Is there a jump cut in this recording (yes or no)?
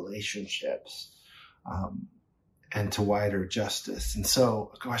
no